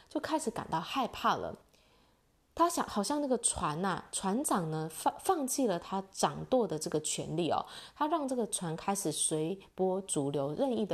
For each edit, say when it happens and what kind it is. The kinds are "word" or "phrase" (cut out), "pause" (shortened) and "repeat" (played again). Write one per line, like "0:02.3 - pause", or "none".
none